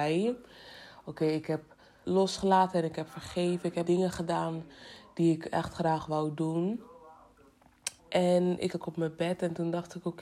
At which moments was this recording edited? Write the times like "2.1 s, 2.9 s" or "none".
2.0 s, 3.8 s, 8.0 s, 8.7 s